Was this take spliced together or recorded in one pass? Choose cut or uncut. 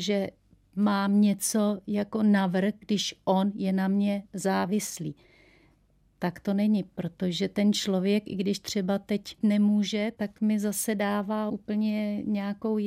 uncut